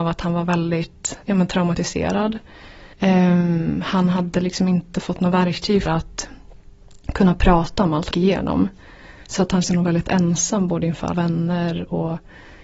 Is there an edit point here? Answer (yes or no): yes